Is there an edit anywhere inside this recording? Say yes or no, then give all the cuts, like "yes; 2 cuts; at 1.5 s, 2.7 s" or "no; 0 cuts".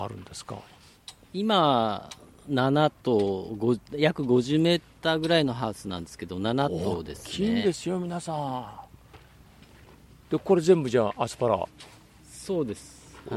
no; 0 cuts